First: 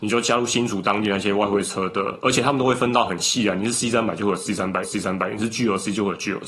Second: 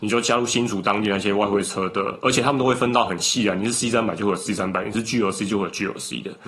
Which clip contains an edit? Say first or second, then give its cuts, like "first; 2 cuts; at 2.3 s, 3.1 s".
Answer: first; 1 cut; at 4.8 s